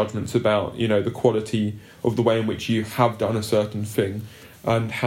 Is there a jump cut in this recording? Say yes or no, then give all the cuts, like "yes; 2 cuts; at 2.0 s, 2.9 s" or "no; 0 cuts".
no; 0 cuts